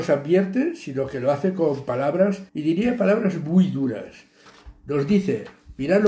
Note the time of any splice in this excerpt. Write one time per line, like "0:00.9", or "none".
0:02.5

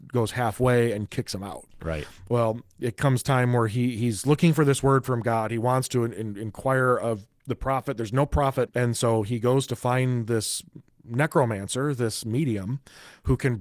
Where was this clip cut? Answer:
0:01.1
0:07.3
0:08.7

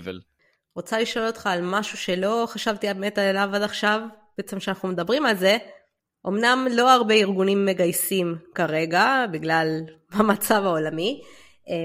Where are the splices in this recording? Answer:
none

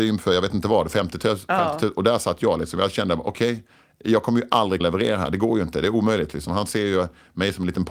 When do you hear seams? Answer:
0:04.8

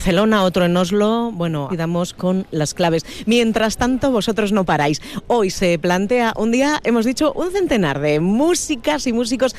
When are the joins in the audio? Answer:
0:01.7

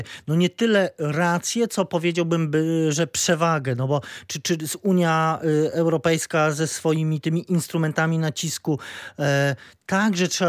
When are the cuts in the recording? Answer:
none

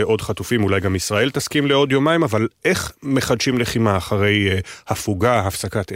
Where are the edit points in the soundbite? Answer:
none

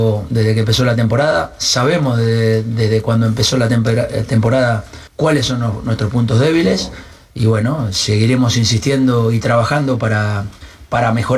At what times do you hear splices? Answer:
0:05.1

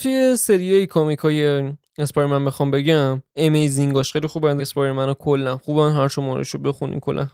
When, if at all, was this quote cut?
0:04.6

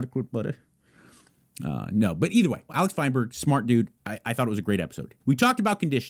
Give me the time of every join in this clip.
0:02.7
0:04.0
0:05.2

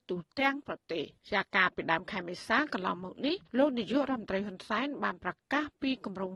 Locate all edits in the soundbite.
0:01.2
0:03.5

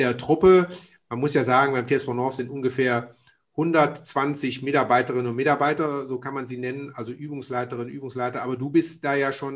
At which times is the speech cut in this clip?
none

